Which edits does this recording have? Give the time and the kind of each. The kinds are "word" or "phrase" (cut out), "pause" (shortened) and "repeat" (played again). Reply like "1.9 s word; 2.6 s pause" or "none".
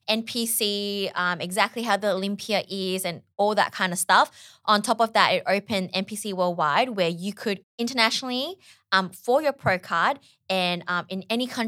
3.3 s pause; 7.6 s word